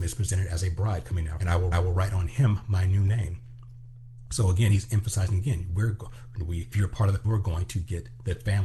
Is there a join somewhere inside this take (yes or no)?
yes